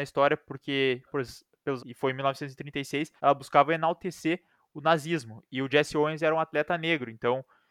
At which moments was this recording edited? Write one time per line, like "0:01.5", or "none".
0:01.1
0:01.8
0:03.2